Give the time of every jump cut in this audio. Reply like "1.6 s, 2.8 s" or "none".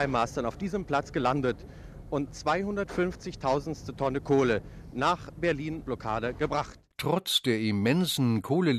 2.3 s, 5.8 s